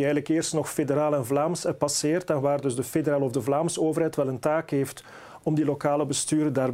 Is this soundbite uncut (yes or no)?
yes